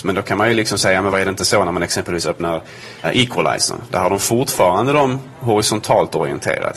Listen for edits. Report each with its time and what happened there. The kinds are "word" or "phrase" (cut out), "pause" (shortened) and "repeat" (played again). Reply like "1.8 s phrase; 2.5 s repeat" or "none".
1.1 s word; 3.0 s word

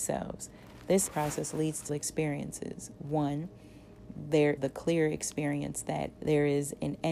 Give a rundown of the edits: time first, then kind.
1.1 s word; 1.9 s word; 4.6 s word; 6.1 s word

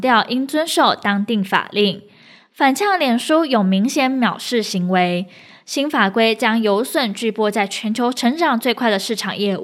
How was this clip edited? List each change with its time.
none

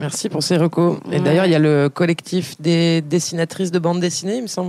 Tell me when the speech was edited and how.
none

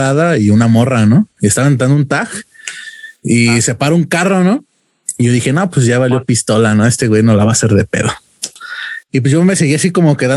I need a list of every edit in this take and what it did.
1.3 s pause; 3.2 s pause; 9.0 s pause

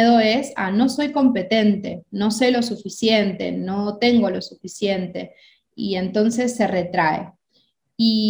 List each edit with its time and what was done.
none

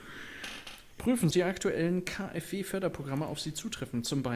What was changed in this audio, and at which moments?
1.3 s phrase

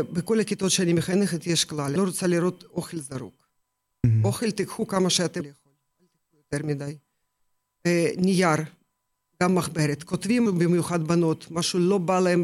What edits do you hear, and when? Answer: 2.0 s word; 5.4 s word; 10.5 s word

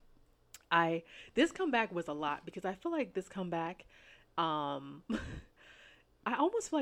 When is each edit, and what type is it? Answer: none

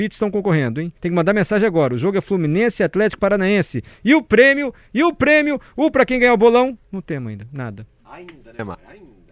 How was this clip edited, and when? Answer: 1.0 s pause; 5.9 s word

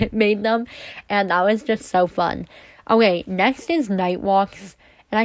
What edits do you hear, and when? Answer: none

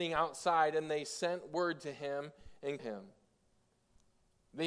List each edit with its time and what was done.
2.8 s word

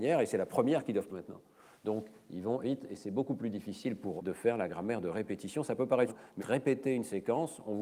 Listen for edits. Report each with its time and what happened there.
1.1 s word; 2.6 s word; 4.2 s word; 6.1 s word; 6.4 s word

